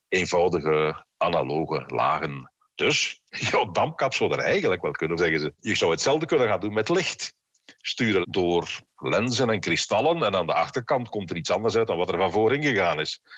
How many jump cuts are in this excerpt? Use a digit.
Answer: 4